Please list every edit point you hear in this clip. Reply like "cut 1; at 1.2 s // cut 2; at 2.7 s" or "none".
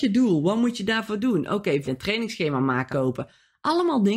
cut 1; at 1.8 s // cut 2; at 2.9 s